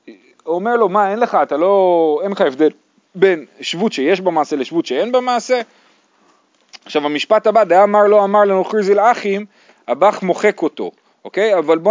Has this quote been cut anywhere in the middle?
no; 0 cuts

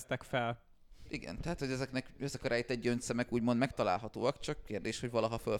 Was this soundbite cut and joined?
no; 0 cuts

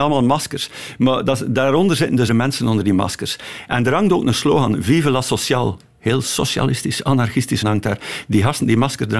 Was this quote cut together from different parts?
yes; 2 cuts; at 2.3 s, 7.6 s

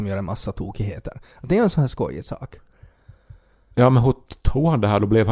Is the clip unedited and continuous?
yes; 0 cuts

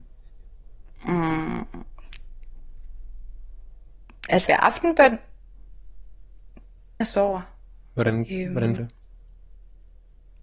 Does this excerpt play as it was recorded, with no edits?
no; 3 cuts; at 4.5 s, 7.0 s, 8.8 s

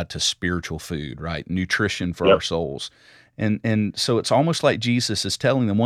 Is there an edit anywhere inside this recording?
no; 0 cuts

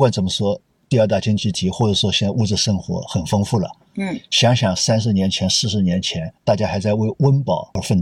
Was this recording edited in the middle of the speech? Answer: yes; 1 cut; at 6.4 s

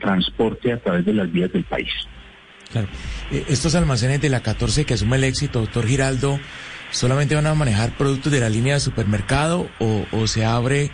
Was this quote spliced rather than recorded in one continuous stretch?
no; 0 cuts

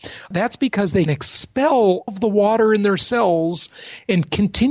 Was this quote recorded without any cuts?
no; 2 cuts; at 1.1 s, 2.1 s

